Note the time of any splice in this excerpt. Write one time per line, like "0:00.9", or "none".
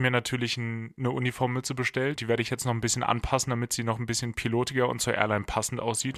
0:02.2